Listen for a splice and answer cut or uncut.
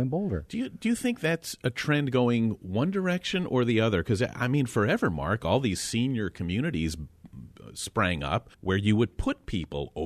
cut